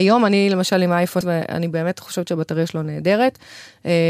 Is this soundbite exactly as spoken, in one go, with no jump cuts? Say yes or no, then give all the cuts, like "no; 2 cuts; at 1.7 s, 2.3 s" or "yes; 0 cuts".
no; 1 cut; at 1.2 s